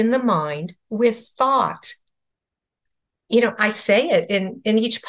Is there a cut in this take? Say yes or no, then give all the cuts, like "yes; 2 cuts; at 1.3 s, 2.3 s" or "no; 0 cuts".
no; 0 cuts